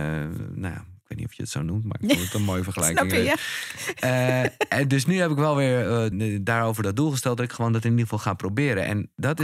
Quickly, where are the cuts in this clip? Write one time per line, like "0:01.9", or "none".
0:06.1